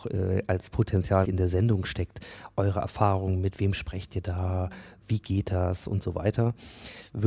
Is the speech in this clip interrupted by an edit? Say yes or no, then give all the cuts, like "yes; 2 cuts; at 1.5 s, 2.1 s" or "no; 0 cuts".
yes; 1 cut; at 1.2 s